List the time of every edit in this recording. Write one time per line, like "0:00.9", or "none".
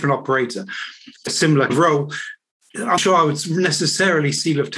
0:01.3
0:01.7
0:03.0